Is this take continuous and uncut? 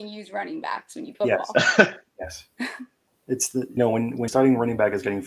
no; 4 cuts; at 1.1 s, 3.1 s, 3.8 s, 4.3 s

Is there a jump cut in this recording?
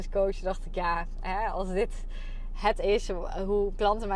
no; 0 cuts

